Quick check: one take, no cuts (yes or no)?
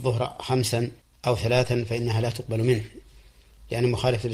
no